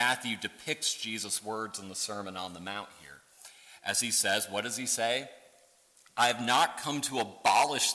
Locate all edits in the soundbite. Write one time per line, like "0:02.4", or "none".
none